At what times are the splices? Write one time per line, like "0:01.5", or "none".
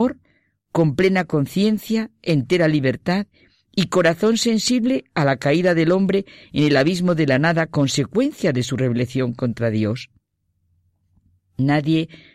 none